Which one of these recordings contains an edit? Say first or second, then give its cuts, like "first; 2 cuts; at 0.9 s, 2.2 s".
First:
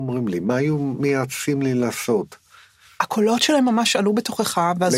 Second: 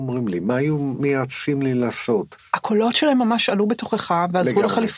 second; 1 cut; at 2.4 s